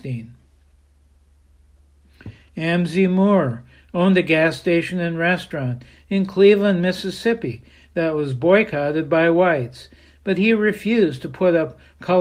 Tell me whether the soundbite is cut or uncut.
uncut